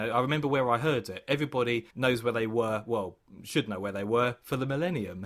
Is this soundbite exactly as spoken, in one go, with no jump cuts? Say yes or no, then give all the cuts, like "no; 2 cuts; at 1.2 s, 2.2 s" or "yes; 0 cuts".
no; 1 cut; at 1.9 s